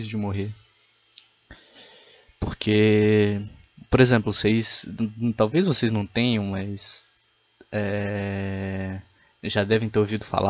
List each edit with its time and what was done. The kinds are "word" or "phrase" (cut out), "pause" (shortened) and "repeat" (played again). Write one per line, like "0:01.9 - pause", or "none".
none